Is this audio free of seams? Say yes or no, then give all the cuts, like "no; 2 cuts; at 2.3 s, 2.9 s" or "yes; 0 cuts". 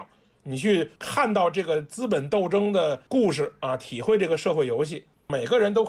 no; 1 cut; at 1.0 s